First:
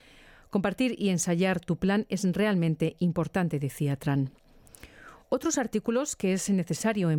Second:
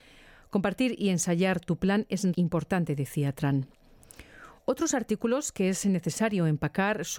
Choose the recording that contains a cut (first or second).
second